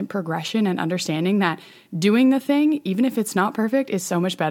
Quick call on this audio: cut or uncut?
uncut